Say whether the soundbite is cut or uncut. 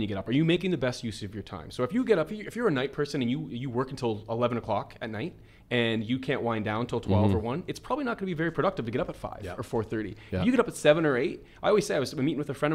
uncut